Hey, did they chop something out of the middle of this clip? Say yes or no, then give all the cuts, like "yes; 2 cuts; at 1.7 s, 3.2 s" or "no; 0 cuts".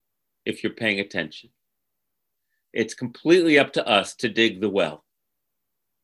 no; 0 cuts